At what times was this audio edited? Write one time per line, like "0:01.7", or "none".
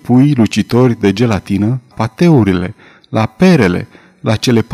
0:01.9